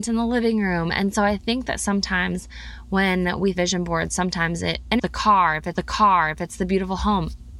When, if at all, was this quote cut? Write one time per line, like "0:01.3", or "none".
0:03.5
0:05.0
0:05.7